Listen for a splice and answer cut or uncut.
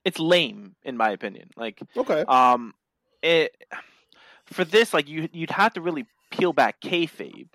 uncut